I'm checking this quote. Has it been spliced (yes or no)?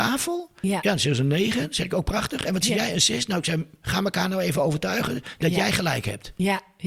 no